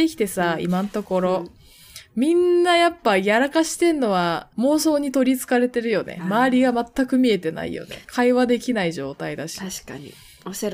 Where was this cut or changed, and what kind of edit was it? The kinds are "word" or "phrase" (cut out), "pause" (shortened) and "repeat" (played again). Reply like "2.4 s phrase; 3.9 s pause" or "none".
4.5 s pause; 8.0 s pause